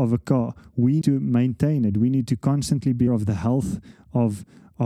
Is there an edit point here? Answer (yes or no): yes